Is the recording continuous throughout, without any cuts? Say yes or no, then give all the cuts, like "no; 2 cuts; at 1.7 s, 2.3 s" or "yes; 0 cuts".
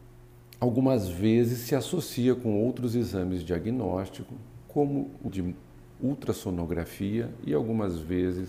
no; 1 cut; at 5.3 s